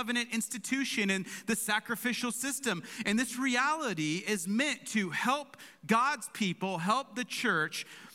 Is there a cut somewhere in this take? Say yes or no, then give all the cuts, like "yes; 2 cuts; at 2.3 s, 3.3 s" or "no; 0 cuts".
no; 0 cuts